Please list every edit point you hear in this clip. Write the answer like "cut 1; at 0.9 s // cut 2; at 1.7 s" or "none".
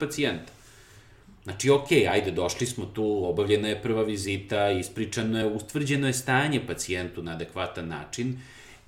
none

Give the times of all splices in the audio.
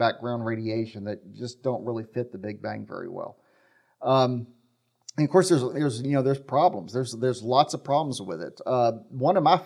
none

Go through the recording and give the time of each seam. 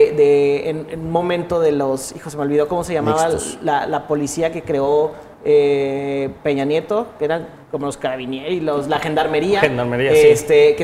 cut 1; at 5.3 s // cut 2; at 7.6 s

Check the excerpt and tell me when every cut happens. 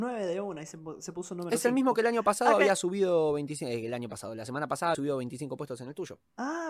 cut 1; at 4.9 s

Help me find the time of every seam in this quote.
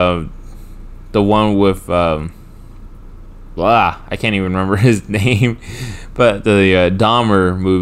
none

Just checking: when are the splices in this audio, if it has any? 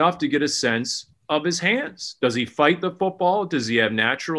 cut 1; at 1.1 s

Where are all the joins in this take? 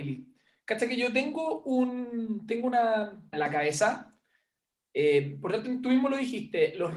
cut 1; at 3.3 s

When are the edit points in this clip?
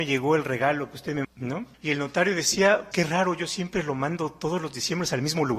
cut 1; at 1.2 s // cut 2; at 1.7 s // cut 3; at 2.9 s

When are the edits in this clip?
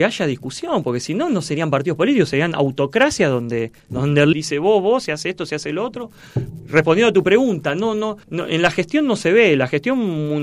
cut 1; at 4.3 s // cut 2; at 8.2 s

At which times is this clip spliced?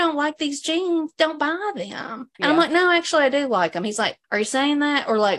cut 1; at 2.3 s // cut 2; at 4.2 s

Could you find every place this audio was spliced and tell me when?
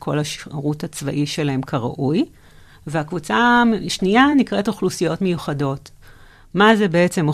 none

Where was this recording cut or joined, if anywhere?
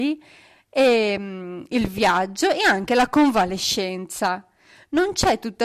none

